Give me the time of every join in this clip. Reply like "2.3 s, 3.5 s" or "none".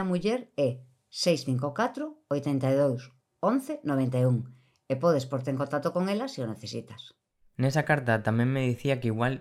none